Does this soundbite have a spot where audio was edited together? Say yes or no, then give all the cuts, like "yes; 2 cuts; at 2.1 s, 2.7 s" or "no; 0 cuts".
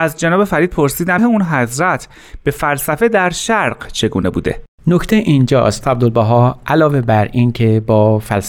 yes; 3 cuts; at 1.2 s, 4.7 s, 5.8 s